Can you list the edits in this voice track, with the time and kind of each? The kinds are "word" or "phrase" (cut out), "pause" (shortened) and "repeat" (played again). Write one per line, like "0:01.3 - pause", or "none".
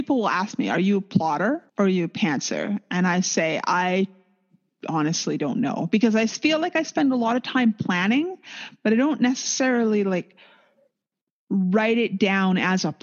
0:01.7 - pause